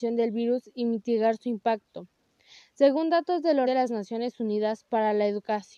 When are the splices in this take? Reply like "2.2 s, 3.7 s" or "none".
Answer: 3.6 s